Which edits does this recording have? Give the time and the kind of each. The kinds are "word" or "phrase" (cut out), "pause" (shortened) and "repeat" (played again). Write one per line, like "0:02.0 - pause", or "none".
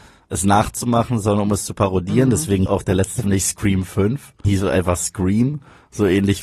0:02.7 - word
0:03.2 - word
0:04.4 - word